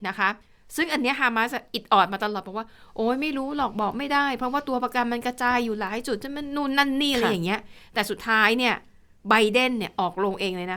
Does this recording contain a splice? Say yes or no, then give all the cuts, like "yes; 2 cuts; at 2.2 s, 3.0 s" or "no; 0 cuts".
no; 0 cuts